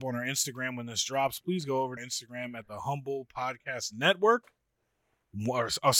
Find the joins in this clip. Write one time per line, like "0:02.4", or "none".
0:02.0

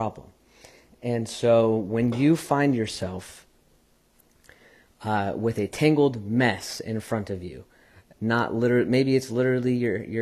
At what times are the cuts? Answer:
none

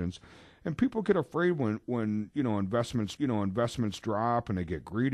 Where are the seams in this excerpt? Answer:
0:03.2

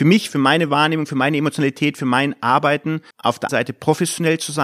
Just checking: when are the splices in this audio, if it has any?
0:03.1
0:03.5

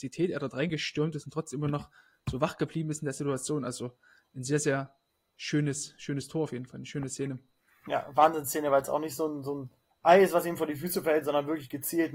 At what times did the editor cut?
none

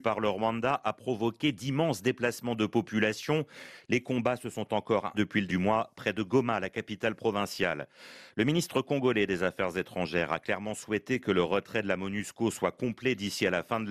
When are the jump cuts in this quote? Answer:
0:05.1
0:05.5

